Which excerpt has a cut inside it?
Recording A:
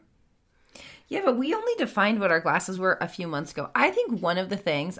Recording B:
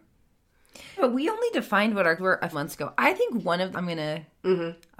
B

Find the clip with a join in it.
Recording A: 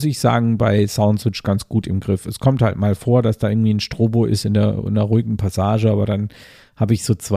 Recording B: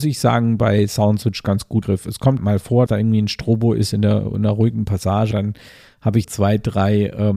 B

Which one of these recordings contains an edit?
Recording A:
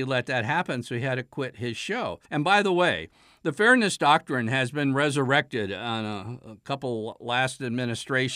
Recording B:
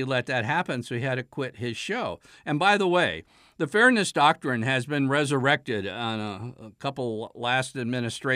A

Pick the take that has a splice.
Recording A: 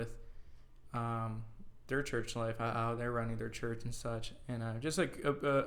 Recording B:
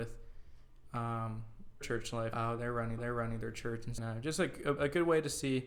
B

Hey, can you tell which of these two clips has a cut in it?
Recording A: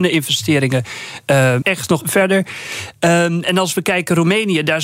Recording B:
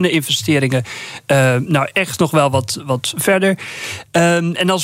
A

